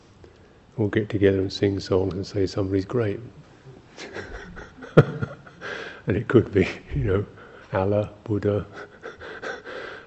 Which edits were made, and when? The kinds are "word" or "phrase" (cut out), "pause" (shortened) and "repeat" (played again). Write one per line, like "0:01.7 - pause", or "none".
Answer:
0:03.4 - pause